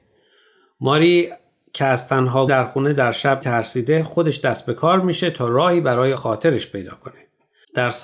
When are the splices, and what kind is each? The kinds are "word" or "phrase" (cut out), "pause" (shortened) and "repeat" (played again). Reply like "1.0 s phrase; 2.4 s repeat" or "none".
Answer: 2.5 s word; 3.4 s word; 6.1 s word